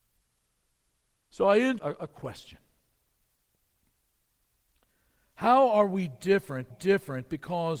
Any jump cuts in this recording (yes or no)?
yes